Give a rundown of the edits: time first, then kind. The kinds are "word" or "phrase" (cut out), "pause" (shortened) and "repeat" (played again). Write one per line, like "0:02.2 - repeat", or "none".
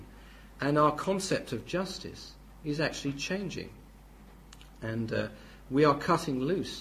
none